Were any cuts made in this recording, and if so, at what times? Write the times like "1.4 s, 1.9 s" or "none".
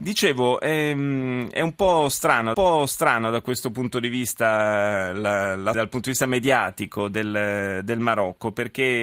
2.5 s, 5.7 s

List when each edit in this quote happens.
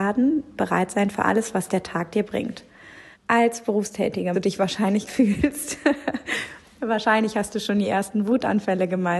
3.1 s, 4.3 s, 5.1 s

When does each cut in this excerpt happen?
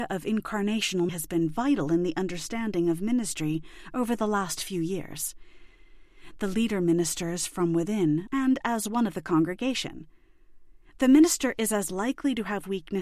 1.1 s, 8.3 s

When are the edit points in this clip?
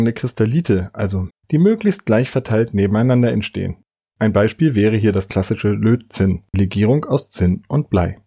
1.3 s, 6.5 s

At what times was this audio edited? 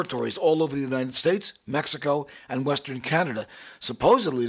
none

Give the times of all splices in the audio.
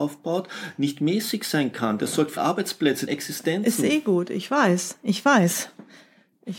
2.4 s, 3.1 s

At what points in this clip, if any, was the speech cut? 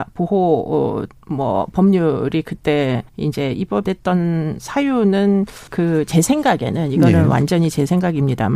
3.1 s, 3.8 s, 5.7 s

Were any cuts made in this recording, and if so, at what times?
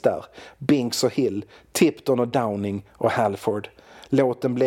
none

